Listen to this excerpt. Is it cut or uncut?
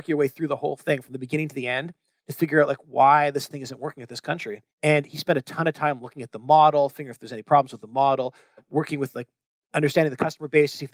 cut